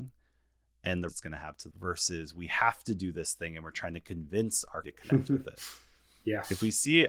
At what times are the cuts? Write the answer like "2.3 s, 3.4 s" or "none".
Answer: 1.1 s, 1.7 s, 4.8 s